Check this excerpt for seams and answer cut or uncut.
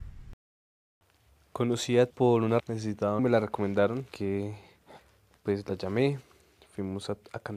cut